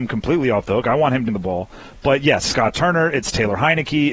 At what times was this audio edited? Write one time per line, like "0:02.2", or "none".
0:01.3
0:02.4